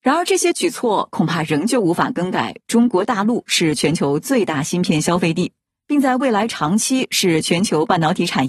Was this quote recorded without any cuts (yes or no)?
yes